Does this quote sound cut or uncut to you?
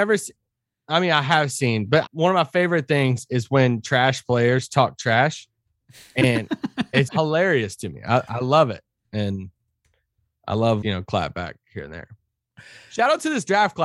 cut